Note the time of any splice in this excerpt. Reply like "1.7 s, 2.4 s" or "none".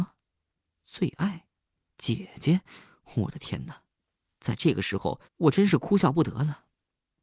5.2 s